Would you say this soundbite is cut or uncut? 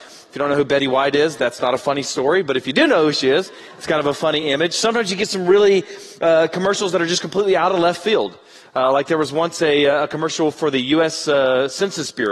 uncut